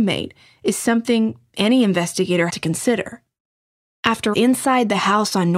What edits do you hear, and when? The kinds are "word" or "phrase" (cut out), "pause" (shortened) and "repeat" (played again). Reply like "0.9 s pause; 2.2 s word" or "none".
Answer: 2.5 s word; 4.3 s word